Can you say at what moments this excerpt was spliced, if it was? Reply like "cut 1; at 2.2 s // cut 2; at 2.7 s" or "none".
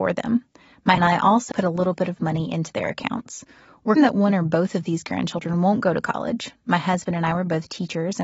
cut 1; at 1.0 s // cut 2; at 1.5 s // cut 3; at 4.0 s